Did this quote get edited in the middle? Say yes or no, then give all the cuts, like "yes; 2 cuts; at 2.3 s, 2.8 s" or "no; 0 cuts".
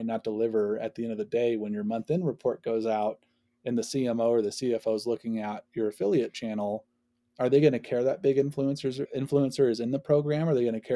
no; 0 cuts